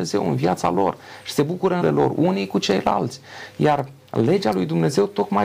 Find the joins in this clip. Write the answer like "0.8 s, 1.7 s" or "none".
1.8 s